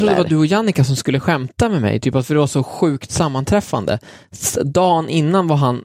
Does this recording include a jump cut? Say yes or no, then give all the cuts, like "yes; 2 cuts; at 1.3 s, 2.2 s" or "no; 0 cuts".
no; 0 cuts